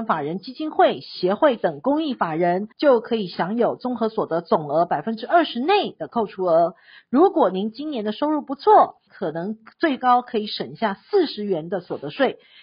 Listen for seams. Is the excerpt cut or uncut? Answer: cut